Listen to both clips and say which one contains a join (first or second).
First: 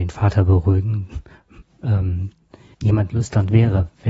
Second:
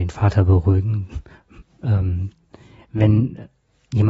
first